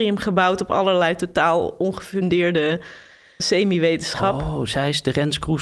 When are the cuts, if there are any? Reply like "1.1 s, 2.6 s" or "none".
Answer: 3.4 s